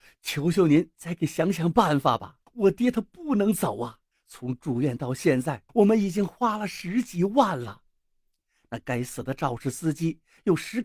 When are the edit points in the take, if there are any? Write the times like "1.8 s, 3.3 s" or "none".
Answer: 2.5 s, 4.1 s, 5.7 s